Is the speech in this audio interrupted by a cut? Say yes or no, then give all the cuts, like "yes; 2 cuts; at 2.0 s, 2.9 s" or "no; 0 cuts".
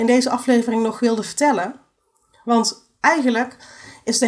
no; 0 cuts